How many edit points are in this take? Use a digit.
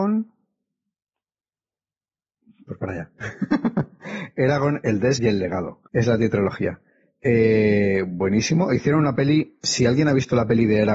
3